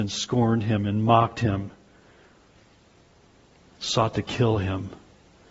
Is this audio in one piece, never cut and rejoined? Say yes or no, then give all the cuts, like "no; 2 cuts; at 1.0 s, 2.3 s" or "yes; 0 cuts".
yes; 0 cuts